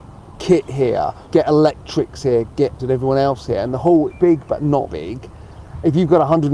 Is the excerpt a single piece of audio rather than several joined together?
no; 4 cuts; at 1.2 s, 2.8 s, 4.1 s, 4.9 s

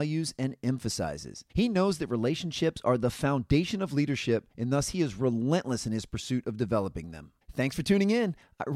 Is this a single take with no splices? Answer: no; 3 cuts; at 1.5 s, 4.5 s, 7.4 s

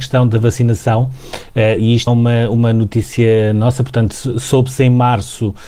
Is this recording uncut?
no; 1 cut; at 2.1 s

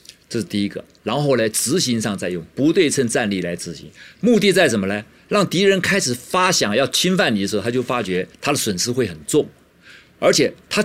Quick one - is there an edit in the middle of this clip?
yes; 1 cut; at 8.3 s

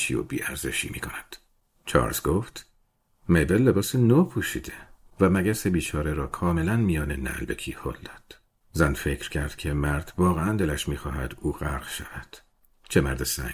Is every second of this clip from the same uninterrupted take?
yes; 0 cuts

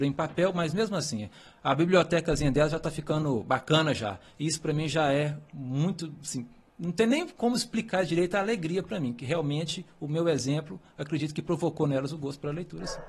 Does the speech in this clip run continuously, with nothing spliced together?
yes; 0 cuts

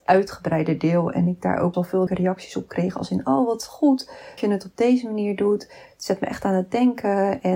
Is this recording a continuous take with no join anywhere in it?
no; 3 cuts; at 1.7 s, 2.1 s, 4.4 s

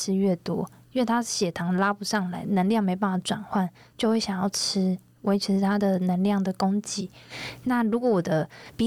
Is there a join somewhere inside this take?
no; 0 cuts

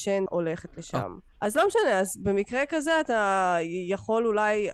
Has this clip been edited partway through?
no; 0 cuts

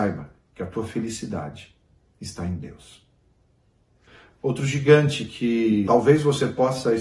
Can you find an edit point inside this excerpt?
no; 0 cuts

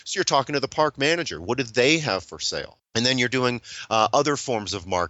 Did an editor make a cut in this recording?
no; 0 cuts

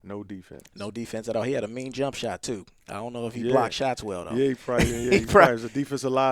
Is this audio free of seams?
yes; 0 cuts

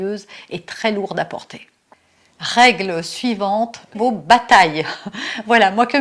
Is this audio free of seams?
no; 1 cut; at 3.9 s

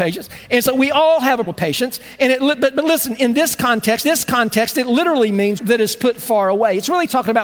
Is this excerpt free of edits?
no; 3 cuts; at 1.5 s, 4.0 s, 5.6 s

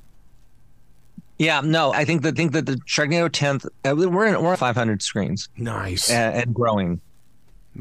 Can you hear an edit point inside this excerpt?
yes; 5 cuts; at 1.3 s, 1.9 s, 2.4 s, 3.7 s, 4.5 s

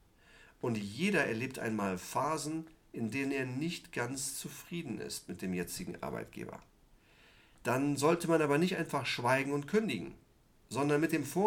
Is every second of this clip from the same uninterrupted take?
yes; 0 cuts

